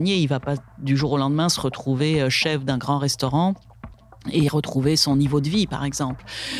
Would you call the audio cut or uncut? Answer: uncut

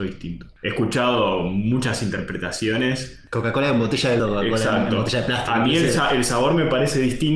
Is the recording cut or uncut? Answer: cut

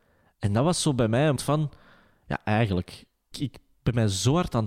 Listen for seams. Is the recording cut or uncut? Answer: cut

